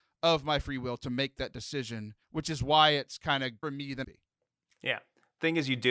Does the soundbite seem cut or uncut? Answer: cut